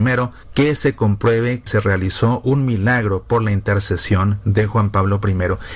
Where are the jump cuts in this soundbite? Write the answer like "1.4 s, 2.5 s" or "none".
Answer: 1.7 s